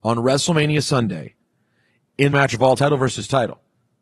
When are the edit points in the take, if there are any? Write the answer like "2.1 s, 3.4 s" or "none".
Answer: 2.3 s, 2.8 s